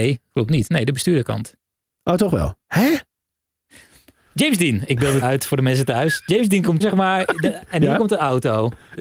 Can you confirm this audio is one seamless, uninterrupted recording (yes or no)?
no